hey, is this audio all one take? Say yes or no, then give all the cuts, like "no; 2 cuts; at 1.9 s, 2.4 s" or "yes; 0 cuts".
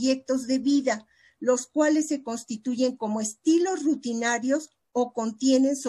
yes; 0 cuts